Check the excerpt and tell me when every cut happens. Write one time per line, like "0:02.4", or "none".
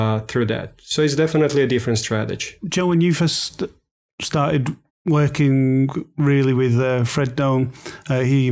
0:02.6
0:04.9

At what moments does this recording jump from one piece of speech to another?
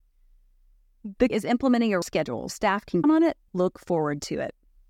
0:01.3
0:02.0
0:02.5
0:03.0
0:03.5

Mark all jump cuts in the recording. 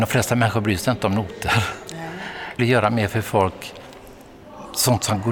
0:02.6

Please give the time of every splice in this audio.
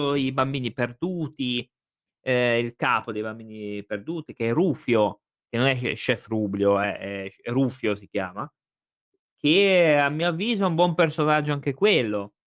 none

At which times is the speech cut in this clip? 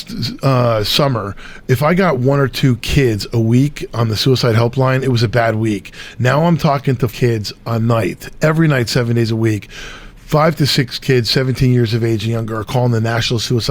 0:07.1

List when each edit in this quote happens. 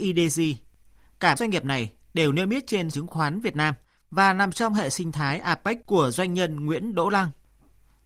0:01.4
0:02.9
0:05.8

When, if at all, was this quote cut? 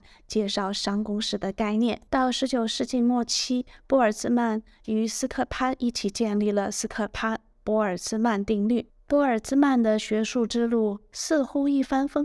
0:02.1
0:08.9

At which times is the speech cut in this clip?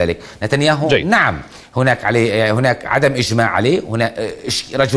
none

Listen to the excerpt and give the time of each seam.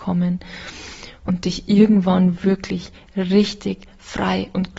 none

